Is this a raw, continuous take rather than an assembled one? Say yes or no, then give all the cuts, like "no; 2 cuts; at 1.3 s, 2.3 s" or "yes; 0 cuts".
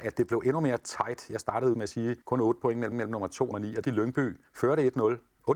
no; 6 cuts; at 1.7 s, 2.2 s, 2.9 s, 3.5 s, 3.8 s, 4.5 s